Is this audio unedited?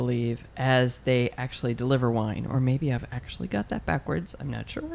yes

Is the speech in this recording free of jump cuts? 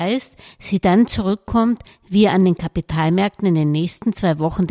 yes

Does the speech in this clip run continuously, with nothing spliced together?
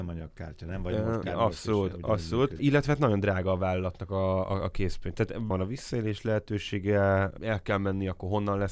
no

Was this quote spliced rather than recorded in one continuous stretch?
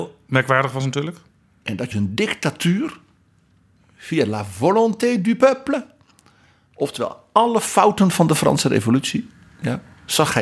yes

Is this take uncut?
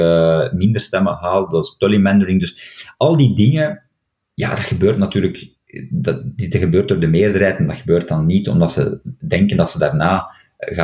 yes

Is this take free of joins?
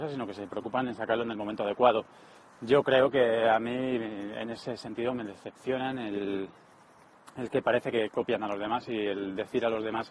yes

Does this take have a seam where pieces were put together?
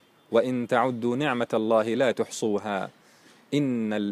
no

